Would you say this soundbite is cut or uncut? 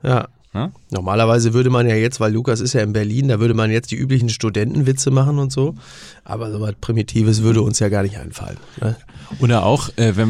uncut